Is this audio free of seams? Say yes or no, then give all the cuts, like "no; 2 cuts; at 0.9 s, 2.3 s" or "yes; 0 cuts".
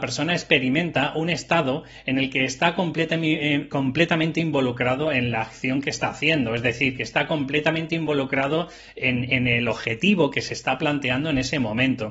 yes; 0 cuts